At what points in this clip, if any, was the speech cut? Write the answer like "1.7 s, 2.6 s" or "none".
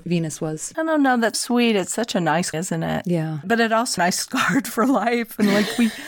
1.3 s, 2.5 s, 4.0 s